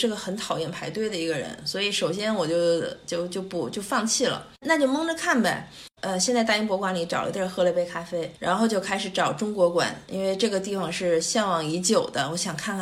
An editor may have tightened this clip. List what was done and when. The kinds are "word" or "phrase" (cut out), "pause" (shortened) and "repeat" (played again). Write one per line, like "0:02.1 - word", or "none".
0:08.4 - pause